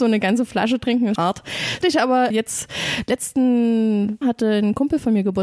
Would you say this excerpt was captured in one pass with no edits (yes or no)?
no